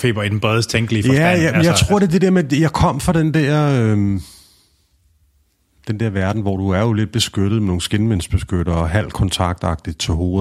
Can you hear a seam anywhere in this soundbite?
no; 0 cuts

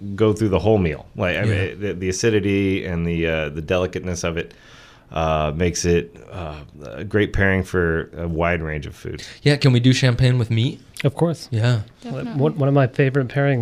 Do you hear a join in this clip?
no; 0 cuts

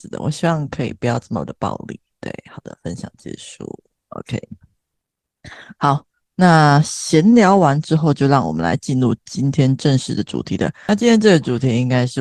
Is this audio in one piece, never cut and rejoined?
yes; 0 cuts

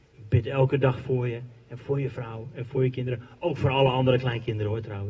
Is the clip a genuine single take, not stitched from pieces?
yes; 0 cuts

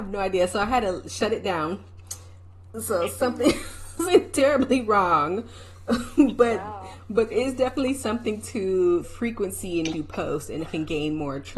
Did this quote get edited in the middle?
yes; 5 cuts; at 4.1 s, 7.3 s, 9.0 s, 9.9 s, 10.6 s

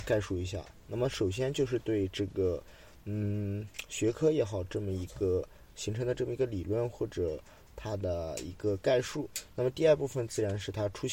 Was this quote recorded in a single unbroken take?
yes; 0 cuts

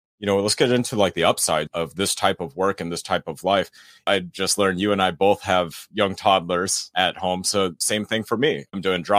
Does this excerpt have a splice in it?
no; 0 cuts

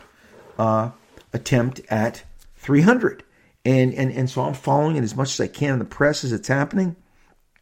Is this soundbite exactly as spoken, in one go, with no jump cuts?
yes; 0 cuts

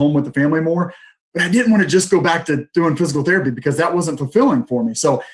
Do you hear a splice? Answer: no; 0 cuts

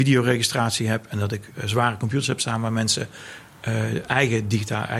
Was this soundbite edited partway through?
no; 0 cuts

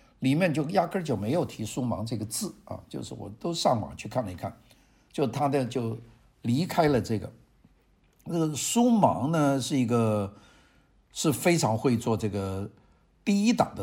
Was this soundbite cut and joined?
no; 0 cuts

